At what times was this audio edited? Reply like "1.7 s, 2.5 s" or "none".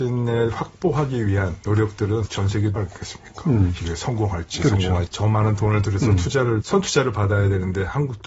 2.3 s, 2.8 s, 5.1 s, 6.6 s

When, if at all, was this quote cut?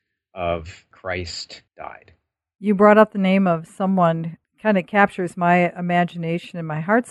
0.9 s, 1.7 s, 4.4 s

